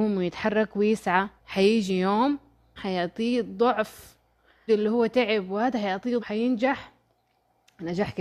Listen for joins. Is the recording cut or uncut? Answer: cut